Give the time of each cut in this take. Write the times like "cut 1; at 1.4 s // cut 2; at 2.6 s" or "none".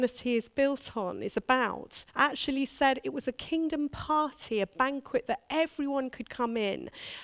cut 1; at 2.1 s